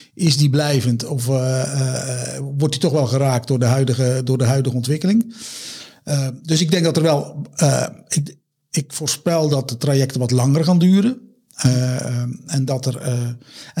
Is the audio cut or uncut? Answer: uncut